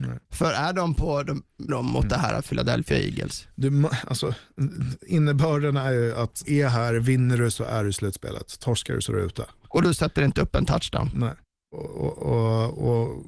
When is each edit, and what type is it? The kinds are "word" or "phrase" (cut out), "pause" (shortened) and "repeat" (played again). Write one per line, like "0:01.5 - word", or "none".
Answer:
0:01.7 - phrase
0:06.4 - word
0:11.4 - pause